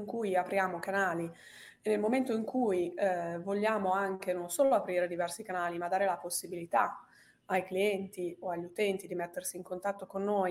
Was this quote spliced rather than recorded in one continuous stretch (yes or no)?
no